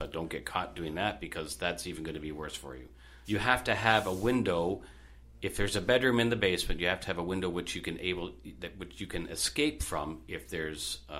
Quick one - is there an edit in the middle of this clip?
yes; 1 cut; at 3.2 s

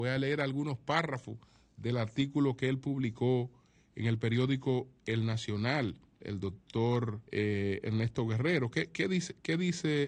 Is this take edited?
yes; 2 cuts; at 6.2 s, 7.3 s

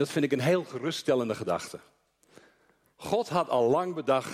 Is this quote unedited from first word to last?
yes; 0 cuts

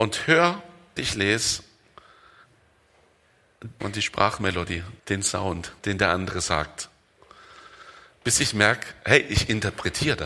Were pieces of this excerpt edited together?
yes; 4 cuts; at 1.0 s, 3.8 s, 5.0 s, 5.8 s

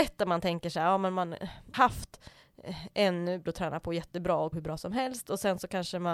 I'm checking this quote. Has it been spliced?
yes; 3 cuts; at 1.7 s, 3.5 s, 4.5 s

